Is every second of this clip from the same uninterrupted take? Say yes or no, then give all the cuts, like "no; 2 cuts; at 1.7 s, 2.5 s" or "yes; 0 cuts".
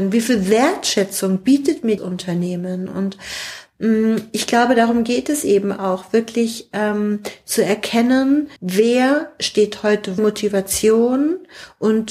no; 3 cuts; at 2.0 s, 8.6 s, 10.2 s